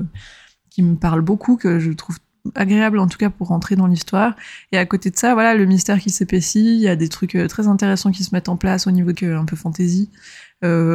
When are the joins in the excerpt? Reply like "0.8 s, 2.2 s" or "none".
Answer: 9.1 s